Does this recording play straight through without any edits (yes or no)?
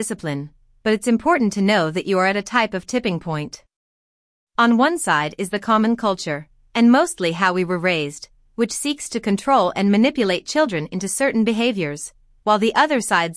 yes